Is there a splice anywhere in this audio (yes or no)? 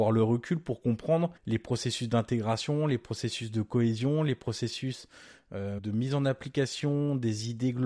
yes